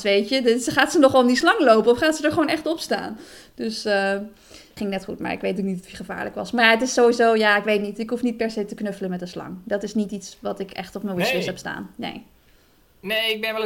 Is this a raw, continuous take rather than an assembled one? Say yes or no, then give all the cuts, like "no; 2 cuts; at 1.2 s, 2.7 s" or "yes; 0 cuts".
no; 1 cut; at 4.8 s